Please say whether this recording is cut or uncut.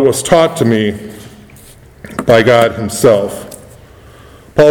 uncut